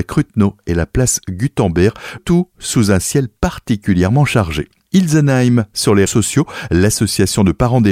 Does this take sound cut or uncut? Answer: cut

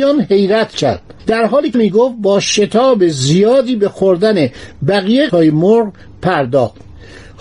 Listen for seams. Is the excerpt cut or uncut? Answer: cut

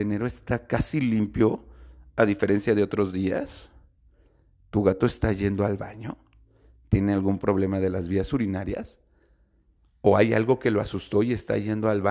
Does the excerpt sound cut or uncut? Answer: uncut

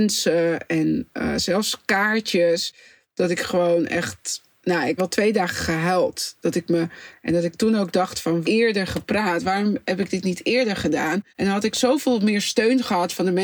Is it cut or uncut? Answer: cut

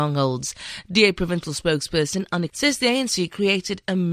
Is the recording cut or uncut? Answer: cut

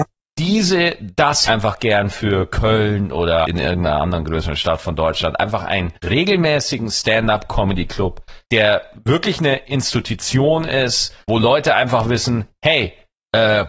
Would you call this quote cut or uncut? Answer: cut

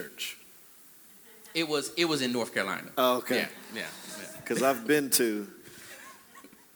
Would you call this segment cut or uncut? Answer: uncut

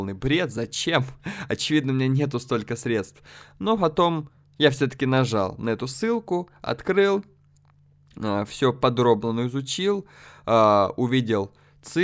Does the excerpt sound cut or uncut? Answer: uncut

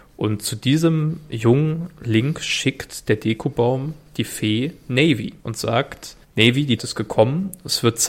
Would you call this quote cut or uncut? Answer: cut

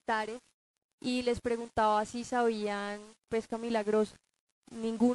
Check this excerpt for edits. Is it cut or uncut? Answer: cut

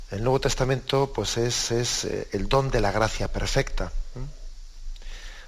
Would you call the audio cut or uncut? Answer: cut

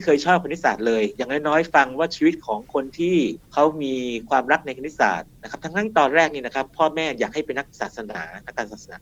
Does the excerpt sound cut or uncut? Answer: cut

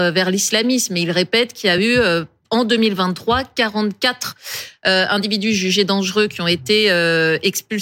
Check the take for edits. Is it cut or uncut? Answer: uncut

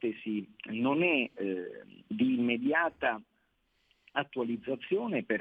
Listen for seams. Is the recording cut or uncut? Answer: uncut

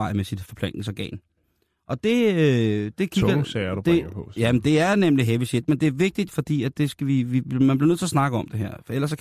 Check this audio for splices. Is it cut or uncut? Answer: cut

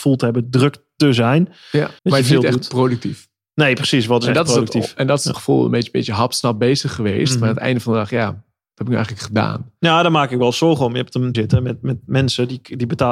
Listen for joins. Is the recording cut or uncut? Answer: cut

